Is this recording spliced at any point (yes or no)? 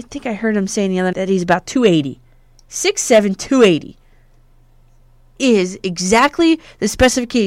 yes